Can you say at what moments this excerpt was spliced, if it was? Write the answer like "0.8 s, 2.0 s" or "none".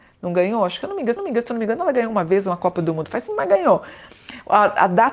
1.2 s, 3.3 s

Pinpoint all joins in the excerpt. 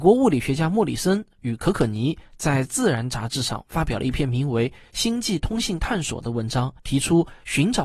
6.8 s

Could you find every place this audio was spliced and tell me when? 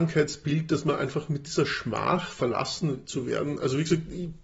none

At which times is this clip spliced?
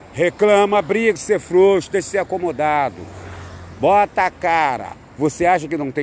1.2 s

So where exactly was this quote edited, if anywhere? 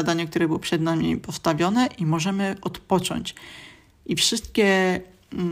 none

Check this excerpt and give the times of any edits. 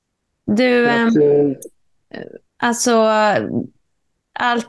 2.4 s

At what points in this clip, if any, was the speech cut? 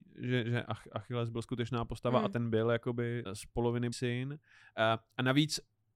3.3 s, 3.9 s

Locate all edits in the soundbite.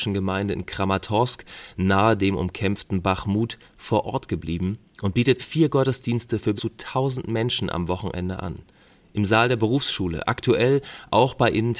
5.4 s, 6.6 s

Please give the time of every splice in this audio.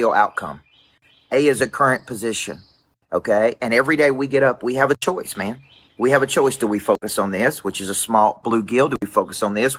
none

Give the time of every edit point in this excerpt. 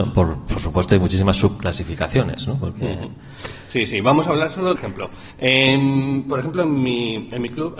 4.8 s, 5.3 s

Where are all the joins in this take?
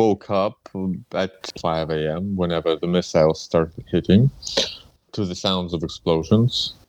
none

